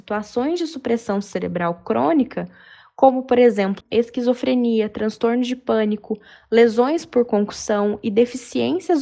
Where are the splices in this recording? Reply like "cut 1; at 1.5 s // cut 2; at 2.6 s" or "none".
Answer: cut 1; at 3.8 s